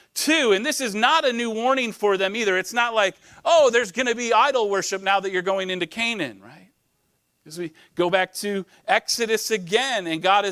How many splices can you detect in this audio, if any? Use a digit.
1